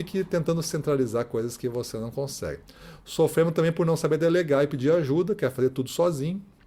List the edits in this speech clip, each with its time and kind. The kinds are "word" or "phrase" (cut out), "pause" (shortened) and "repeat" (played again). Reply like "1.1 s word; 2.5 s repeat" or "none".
none